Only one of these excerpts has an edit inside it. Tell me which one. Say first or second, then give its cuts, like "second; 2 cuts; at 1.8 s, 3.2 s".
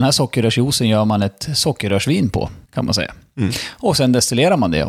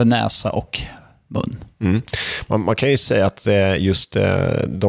first; 1 cut; at 2.6 s